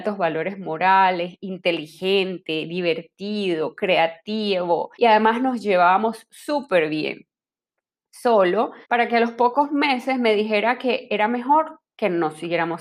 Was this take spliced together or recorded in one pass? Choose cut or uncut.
cut